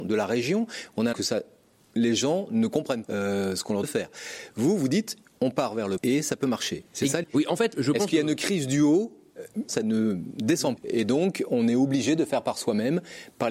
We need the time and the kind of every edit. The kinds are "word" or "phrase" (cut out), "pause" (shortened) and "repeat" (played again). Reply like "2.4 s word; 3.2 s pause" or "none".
1.1 s word; 3.0 s word; 3.8 s word; 6.0 s word; 7.2 s word; 7.7 s word; 9.7 s word; 10.8 s word